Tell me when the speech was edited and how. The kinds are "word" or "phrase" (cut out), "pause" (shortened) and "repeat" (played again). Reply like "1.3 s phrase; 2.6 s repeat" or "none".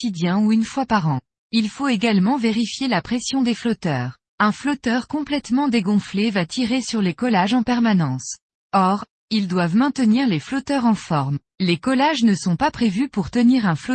1.3 s pause; 4.2 s pause; 8.6 s pause; 11.4 s pause